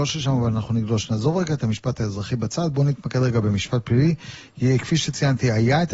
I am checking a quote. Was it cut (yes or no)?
no